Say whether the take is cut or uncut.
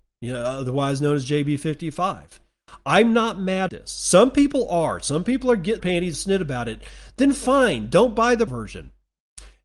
cut